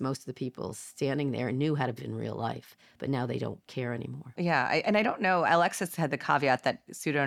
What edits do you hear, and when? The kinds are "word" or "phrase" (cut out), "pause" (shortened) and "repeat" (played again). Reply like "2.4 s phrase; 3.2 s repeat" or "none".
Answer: 2.0 s word